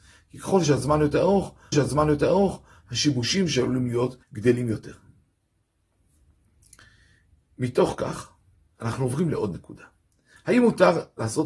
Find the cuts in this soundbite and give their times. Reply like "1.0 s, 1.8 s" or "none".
1.7 s, 4.2 s, 8.8 s